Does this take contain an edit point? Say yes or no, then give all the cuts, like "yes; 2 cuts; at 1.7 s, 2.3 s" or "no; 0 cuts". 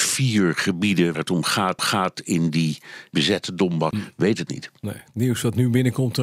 yes; 5 cuts; at 1.1 s, 1.8 s, 3.1 s, 3.9 s, 4.5 s